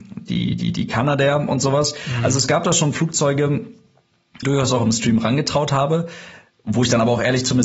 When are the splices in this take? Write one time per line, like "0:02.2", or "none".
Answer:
0:04.4